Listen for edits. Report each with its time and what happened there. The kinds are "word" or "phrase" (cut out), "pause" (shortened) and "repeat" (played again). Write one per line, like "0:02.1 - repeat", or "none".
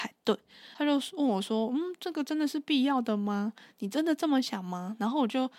none